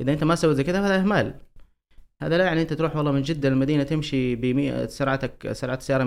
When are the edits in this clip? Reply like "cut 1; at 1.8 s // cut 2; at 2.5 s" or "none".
none

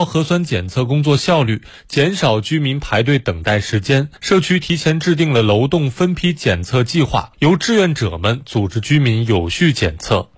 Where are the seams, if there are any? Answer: cut 1; at 4.2 s

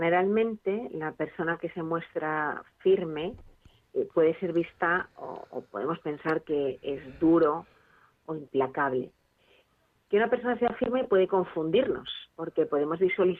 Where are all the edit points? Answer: none

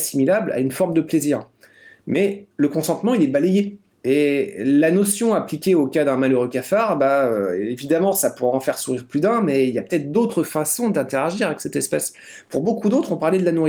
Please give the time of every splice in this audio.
cut 1; at 2.5 s // cut 2; at 3.9 s

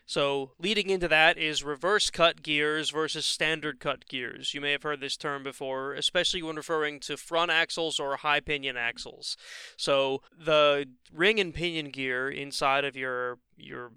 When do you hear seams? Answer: cut 1; at 10.3 s

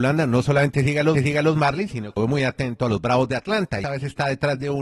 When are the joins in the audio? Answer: cut 1; at 1.1 s // cut 2; at 2.2 s // cut 3; at 3.8 s

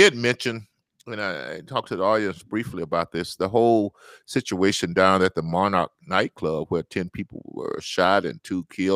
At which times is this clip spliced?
none

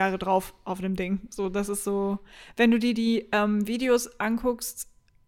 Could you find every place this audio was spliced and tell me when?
none

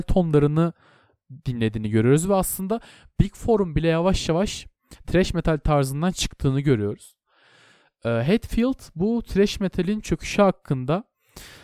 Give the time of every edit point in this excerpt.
none

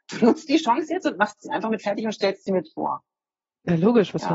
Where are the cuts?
none

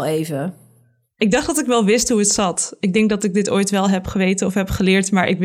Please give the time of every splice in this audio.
none

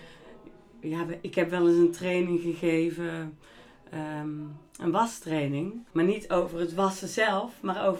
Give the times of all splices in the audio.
cut 1; at 5.9 s

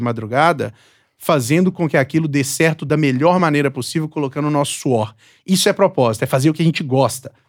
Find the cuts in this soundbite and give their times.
none

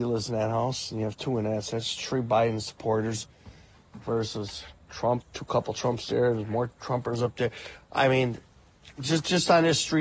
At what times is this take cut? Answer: cut 1; at 5.2 s

